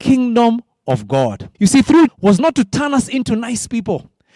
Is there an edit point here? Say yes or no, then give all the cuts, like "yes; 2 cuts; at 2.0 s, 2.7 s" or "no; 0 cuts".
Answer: yes; 2 cuts; at 1.5 s, 2.1 s